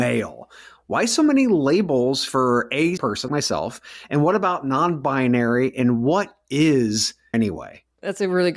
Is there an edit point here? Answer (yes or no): yes